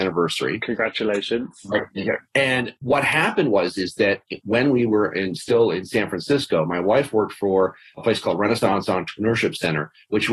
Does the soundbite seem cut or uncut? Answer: uncut